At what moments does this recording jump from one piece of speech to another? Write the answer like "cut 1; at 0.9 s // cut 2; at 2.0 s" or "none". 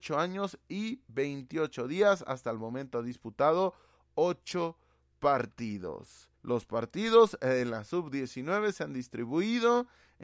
cut 1; at 6.4 s